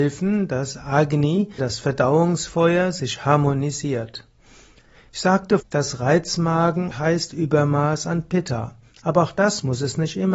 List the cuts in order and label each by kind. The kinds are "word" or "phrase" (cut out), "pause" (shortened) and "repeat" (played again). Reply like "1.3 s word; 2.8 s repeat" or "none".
1.6 s word; 5.6 s word; 6.9 s word